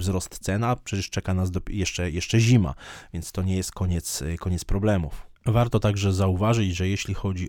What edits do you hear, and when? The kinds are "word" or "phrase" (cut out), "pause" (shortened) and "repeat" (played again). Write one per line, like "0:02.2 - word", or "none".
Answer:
0:05.4 - pause